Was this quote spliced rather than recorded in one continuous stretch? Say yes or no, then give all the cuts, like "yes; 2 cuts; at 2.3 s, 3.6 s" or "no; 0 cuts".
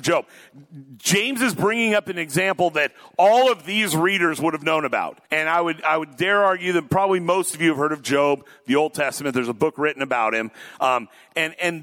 yes; 1 cut; at 5.3 s